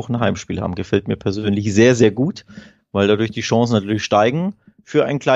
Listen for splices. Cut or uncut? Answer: uncut